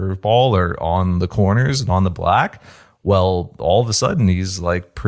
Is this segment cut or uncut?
uncut